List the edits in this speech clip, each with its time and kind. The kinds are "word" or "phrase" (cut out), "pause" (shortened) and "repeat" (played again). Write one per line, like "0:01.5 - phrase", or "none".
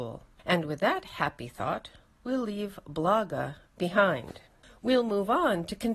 none